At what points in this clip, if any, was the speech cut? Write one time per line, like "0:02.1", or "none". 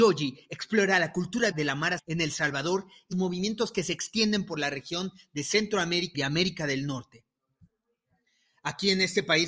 0:01.5
0:02.0
0:03.1
0:06.1

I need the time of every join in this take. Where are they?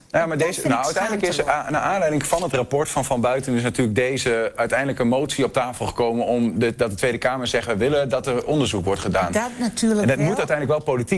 none

